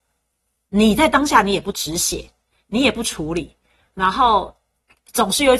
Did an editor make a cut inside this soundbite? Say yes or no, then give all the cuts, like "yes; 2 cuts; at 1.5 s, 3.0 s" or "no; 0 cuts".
no; 0 cuts